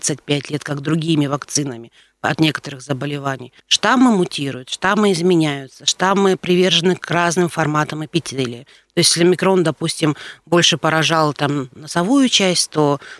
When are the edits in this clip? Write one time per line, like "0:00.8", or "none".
0:03.6